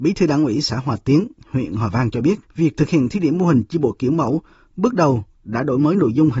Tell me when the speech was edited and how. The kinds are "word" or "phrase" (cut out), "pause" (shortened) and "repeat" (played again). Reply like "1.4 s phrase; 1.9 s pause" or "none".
2.4 s pause